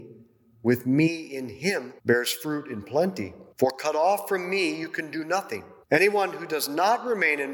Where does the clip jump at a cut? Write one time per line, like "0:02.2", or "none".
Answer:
0:02.0
0:03.5
0:05.8